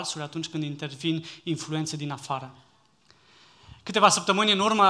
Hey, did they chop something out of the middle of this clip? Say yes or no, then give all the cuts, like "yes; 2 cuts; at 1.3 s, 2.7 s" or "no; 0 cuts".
no; 0 cuts